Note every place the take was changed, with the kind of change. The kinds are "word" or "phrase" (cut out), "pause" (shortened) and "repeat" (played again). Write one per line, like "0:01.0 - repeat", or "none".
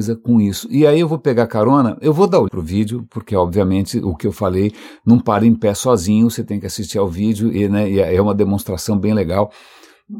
0:02.5 - word